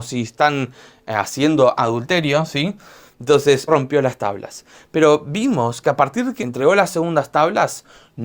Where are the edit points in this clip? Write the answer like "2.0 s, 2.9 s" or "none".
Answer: 1.8 s, 3.7 s, 6.4 s